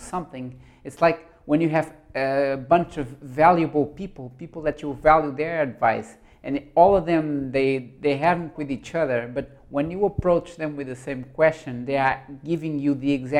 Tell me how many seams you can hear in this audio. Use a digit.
1